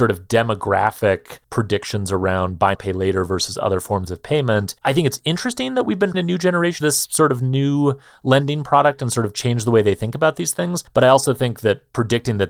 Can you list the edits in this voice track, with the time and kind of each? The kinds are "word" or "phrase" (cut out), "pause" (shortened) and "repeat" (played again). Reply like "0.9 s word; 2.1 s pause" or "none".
1.4 s pause; 2.7 s word; 4.8 s pause; 6.1 s word; 6.8 s phrase; 10.9 s pause